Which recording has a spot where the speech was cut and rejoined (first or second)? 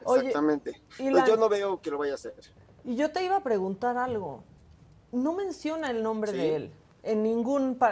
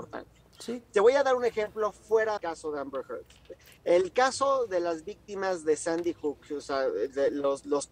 second